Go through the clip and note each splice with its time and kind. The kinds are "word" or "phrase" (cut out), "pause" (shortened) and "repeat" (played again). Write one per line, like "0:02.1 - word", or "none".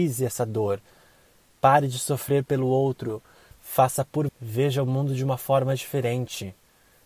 0:04.3 - phrase